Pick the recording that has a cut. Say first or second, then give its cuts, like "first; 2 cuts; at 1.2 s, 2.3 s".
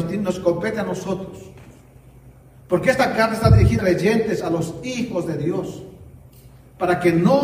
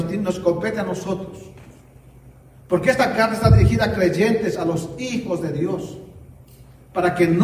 first; 1 cut; at 3.8 s